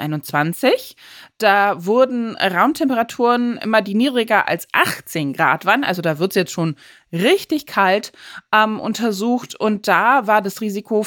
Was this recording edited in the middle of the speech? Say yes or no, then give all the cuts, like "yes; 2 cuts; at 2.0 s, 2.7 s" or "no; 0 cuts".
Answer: no; 0 cuts